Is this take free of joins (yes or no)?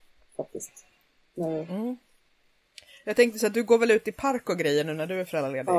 yes